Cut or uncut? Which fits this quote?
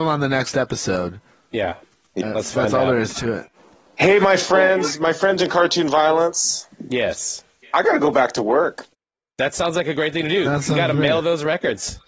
uncut